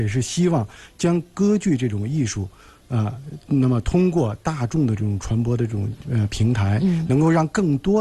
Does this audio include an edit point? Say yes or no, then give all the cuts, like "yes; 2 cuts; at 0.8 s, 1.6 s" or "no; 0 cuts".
no; 0 cuts